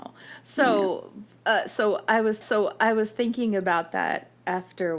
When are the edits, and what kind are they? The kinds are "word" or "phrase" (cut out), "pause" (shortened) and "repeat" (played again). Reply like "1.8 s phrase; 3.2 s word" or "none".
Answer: 2.4 s repeat